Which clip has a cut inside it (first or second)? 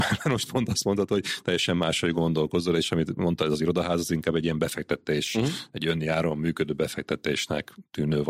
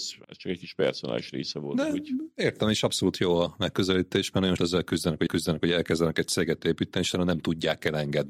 second